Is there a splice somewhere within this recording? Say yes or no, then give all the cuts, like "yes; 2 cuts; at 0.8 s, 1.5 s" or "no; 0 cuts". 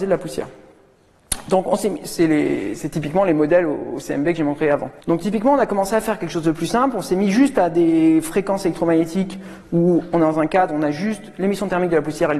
yes; 1 cut; at 5.0 s